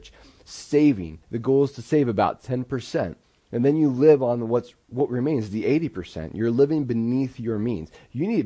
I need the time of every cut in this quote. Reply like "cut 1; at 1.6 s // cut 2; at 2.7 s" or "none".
cut 1; at 1.2 s // cut 2; at 3.2 s